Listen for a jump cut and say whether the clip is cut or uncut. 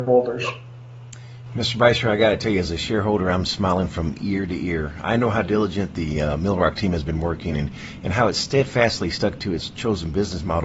uncut